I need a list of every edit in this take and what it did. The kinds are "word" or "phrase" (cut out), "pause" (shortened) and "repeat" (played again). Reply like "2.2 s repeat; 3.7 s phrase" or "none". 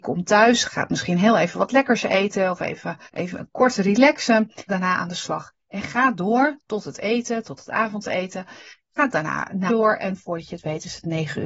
3.1 s pause; 4.7 s phrase; 9.7 s phrase